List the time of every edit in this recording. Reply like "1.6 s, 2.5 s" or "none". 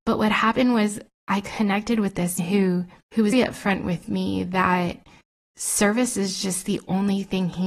2.4 s, 3.0 s, 3.3 s